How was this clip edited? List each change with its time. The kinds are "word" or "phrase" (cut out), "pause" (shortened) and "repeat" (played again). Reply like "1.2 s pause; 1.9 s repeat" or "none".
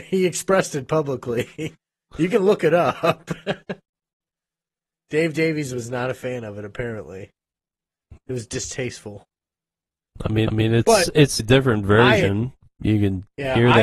10.5 s repeat; 11.4 s word

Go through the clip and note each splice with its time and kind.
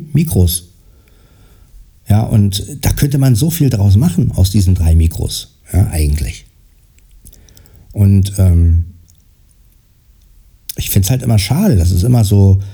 none

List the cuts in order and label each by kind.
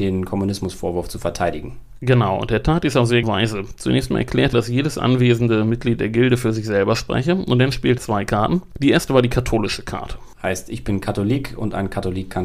3.2 s word; 4.5 s word; 8.0 s word

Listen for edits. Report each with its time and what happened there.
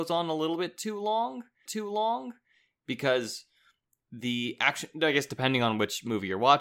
1.7 s repeat

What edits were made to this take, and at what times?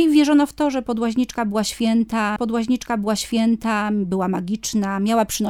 2.4 s repeat

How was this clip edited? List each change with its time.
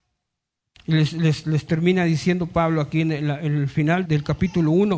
4.1 s word

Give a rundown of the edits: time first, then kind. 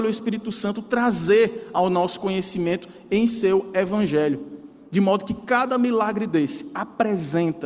none

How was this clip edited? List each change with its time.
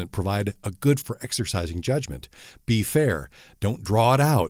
1.0 s word

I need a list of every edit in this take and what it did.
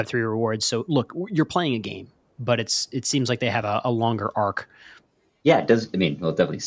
none

